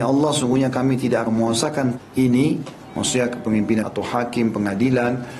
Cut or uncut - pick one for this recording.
cut